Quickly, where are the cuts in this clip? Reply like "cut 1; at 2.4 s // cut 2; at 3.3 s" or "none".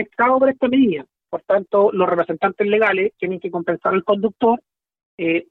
none